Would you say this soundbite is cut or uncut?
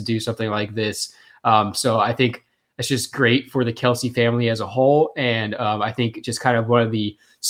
uncut